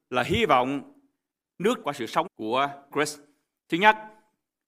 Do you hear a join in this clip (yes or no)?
yes